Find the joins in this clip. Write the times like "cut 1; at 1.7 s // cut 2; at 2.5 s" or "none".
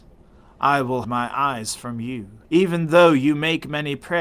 cut 1; at 1.0 s // cut 2; at 2.4 s